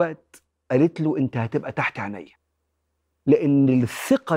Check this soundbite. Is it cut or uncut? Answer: uncut